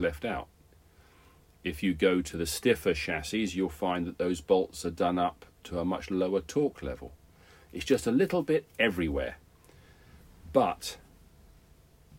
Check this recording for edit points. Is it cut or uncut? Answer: uncut